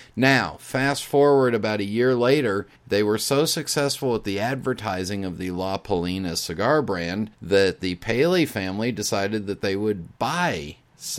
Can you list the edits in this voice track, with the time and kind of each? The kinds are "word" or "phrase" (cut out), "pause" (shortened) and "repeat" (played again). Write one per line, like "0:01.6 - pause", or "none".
0:02.7 - pause
0:07.3 - pause
0:10.2 - pause